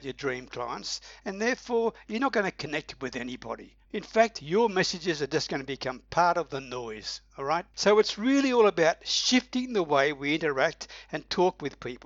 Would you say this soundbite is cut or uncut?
cut